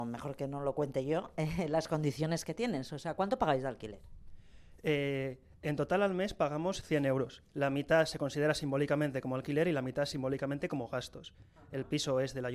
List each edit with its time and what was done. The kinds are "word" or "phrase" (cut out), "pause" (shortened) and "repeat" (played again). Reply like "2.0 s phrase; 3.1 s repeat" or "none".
7.5 s pause

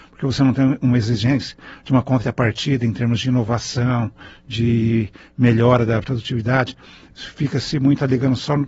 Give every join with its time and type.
none

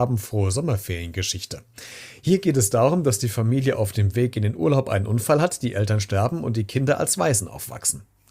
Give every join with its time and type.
none

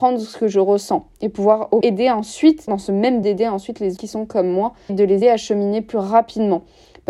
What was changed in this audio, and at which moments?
1.8 s word; 2.7 s word; 3.2 s word; 4.0 s word; 4.9 s word; 5.2 s word

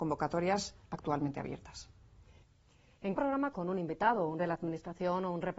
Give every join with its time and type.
3.2 s word; 3.5 s word; 4.4 s word

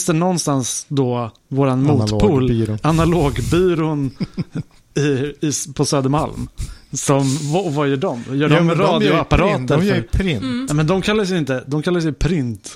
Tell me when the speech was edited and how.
1.4 s pause

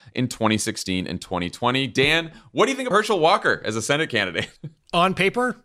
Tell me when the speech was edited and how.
2.9 s word; 4.6 s pause

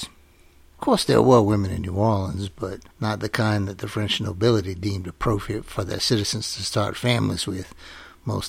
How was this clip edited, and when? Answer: 2.9 s pause

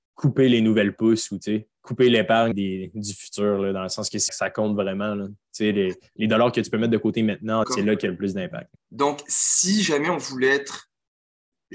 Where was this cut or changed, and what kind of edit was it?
1.7 s pause; 2.5 s word; 4.3 s phrase; 7.6 s phrase; 8.8 s pause

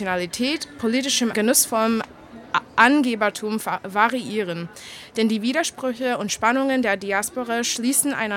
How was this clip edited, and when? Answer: 1.3 s phrase

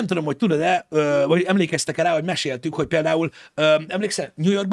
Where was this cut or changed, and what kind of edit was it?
none

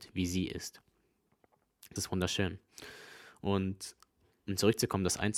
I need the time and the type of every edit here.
2.0 s word

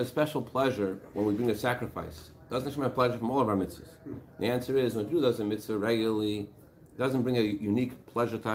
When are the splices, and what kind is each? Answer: none

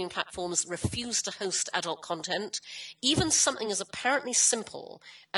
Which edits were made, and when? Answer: none

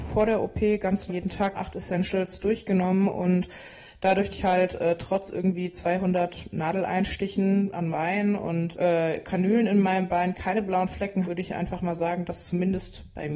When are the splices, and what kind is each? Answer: 1.1 s word; 1.5 s word; 4.3 s word; 7.9 s word; 8.7 s word; 11.2 s word

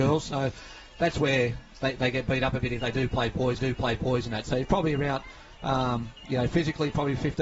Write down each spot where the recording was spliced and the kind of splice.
3.6 s repeat

